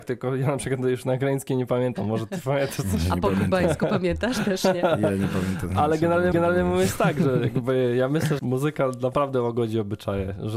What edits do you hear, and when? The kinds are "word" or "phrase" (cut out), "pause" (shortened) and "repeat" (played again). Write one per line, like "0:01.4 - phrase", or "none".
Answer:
0:06.3 - repeat
0:08.4 - word